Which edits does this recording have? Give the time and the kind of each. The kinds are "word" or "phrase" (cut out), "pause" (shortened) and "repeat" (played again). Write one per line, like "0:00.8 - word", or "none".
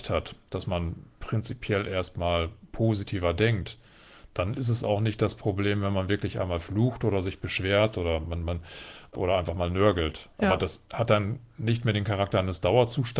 none